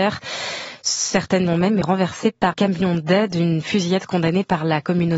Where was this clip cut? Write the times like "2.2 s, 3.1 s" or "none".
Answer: 1.5 s, 1.8 s, 2.5 s